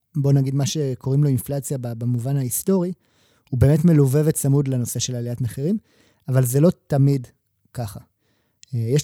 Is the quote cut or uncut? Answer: uncut